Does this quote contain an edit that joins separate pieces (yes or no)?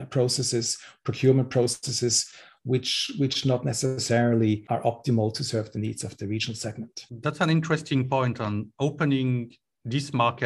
no